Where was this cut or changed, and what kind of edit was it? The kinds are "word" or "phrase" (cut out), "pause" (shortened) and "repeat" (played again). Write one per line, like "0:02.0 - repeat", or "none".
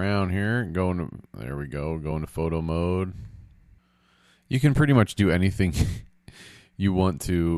none